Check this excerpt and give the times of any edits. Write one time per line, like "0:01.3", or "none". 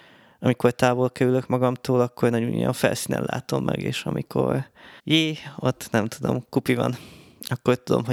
0:05.0